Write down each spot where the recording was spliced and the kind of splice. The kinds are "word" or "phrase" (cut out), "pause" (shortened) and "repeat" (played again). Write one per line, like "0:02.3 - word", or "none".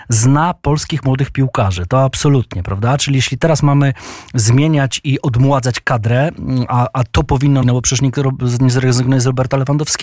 0:07.6 - phrase